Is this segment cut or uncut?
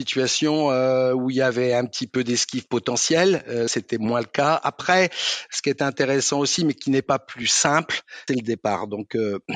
cut